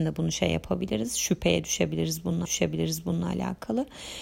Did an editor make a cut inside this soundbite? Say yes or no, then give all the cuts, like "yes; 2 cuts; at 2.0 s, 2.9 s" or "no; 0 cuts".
yes; 1 cut; at 2.5 s